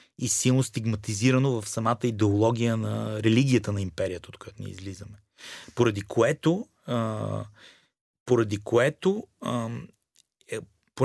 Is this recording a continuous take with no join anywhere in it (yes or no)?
yes